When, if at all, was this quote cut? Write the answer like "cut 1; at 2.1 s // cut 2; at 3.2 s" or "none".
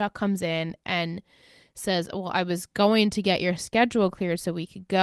none